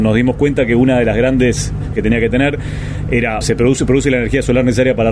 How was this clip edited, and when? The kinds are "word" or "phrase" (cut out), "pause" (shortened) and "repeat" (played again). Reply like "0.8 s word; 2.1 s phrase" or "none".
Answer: 1.9 s word; 3.4 s word